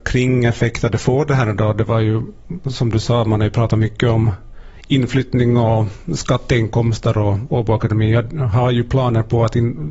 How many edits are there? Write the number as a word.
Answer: zero